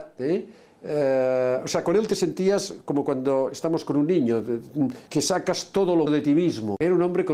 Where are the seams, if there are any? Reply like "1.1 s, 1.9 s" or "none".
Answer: 5.1 s, 6.1 s